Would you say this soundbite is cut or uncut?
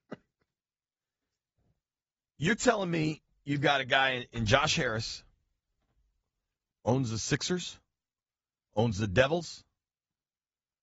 uncut